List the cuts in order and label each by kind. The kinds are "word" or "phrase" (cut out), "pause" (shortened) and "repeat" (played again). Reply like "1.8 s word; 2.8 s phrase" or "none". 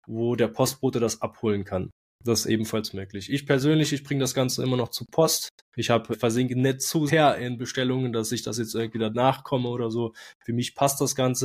5.6 s pause; 6.1 s word; 7.1 s word; 9.1 s word

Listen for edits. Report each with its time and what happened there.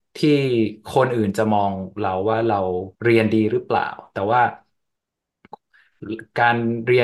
2.9 s pause

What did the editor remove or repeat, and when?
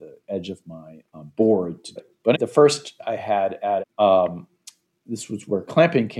1.0 s word; 2.0 s word; 2.3 s word; 3.0 s word; 3.8 s word

